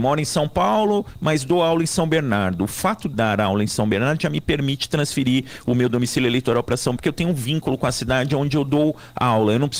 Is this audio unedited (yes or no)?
no